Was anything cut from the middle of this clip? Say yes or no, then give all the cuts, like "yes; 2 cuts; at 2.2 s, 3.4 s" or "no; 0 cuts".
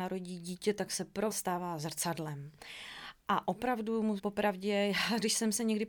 yes; 2 cuts; at 1.3 s, 4.2 s